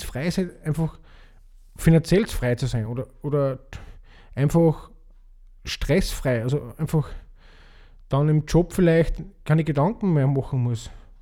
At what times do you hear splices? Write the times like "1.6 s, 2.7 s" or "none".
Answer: none